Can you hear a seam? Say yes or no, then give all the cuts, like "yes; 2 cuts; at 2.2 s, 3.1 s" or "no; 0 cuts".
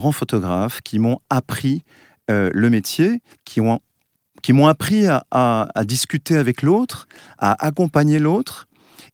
yes; 1 cut; at 3.3 s